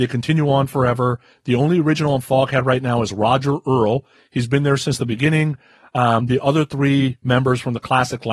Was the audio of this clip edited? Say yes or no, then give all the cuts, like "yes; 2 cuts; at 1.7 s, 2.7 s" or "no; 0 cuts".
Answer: no; 0 cuts